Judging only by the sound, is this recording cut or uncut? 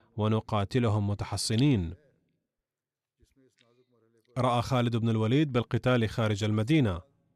uncut